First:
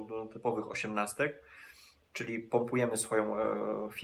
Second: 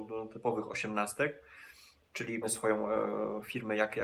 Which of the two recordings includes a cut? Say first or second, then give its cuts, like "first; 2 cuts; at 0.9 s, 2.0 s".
second; 1 cut; at 2.4 s